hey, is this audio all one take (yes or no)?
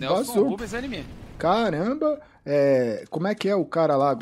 yes